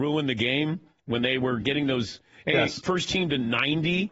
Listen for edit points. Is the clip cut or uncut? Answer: uncut